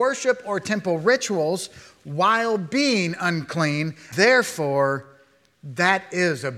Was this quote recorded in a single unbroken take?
no; 1 cut; at 4.1 s

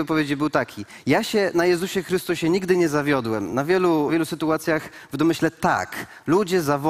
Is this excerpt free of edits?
no; 1 cut; at 4.1 s

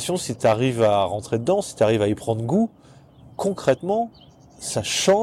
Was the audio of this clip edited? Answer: no; 0 cuts

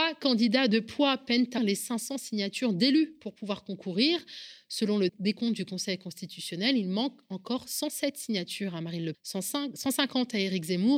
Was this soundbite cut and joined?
yes; 3 cuts; at 1.6 s, 5.1 s, 9.1 s

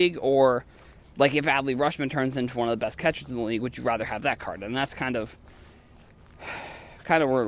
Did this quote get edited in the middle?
no; 0 cuts

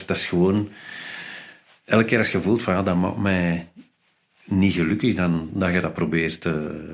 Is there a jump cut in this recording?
no; 0 cuts

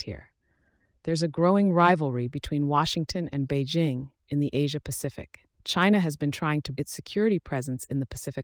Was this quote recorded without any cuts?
no; 2 cuts; at 5.5 s, 6.8 s

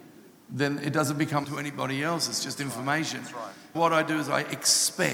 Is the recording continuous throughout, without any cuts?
no; 2 cuts; at 1.4 s, 3.7 s

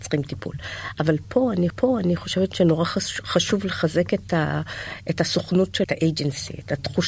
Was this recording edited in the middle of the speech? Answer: yes; 2 cuts; at 1.7 s, 5.8 s

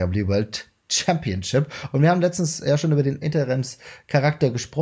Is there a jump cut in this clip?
yes; 1 cut; at 3.2 s

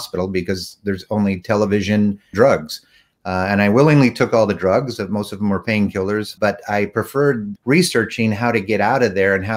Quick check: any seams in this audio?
yes; 3 cuts; at 2.3 s, 6.4 s, 7.6 s

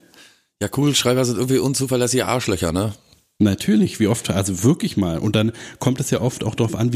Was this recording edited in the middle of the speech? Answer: no; 0 cuts

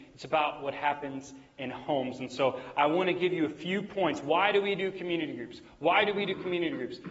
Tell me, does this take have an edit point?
no; 0 cuts

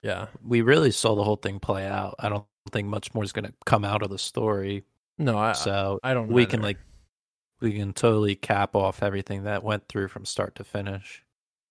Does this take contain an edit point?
no; 0 cuts

